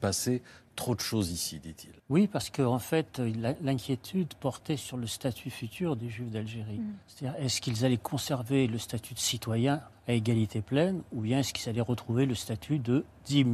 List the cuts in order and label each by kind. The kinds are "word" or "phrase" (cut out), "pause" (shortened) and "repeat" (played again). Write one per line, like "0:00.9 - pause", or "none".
0:02.0 - pause
0:07.0 - pause
0:09.9 - pause